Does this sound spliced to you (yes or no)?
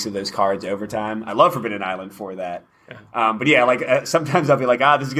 no